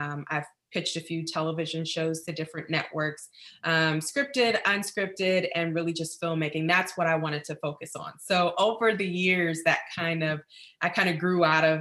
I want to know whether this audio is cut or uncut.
uncut